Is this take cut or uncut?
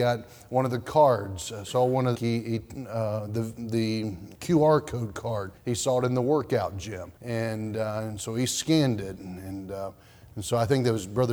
cut